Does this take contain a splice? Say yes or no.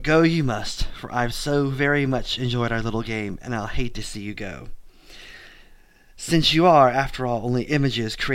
no